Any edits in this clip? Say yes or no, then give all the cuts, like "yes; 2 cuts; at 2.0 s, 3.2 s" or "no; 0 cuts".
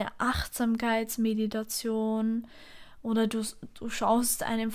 no; 0 cuts